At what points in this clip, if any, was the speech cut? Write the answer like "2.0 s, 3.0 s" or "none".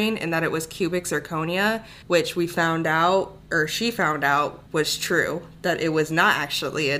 2.0 s, 4.7 s